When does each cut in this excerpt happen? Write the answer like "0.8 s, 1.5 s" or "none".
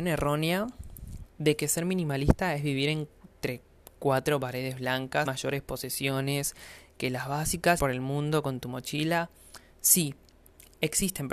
5.2 s, 7.8 s